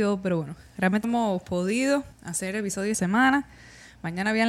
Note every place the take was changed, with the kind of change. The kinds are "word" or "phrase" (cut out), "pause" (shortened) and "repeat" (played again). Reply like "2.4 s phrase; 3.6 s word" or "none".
1.0 s word; 2.1 s pause; 2.9 s word